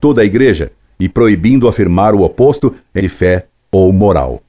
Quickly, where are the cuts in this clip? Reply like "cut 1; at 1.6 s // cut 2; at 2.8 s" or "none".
cut 1; at 3.0 s